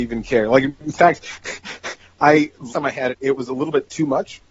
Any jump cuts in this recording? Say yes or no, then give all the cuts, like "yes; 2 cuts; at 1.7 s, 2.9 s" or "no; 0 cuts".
yes; 2 cuts; at 2.7 s, 3.1 s